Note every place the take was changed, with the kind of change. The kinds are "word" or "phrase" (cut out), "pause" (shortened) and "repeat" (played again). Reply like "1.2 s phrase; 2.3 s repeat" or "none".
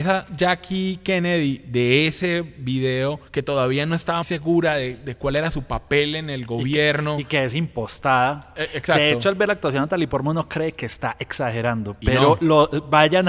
3.3 s pause; 4.2 s word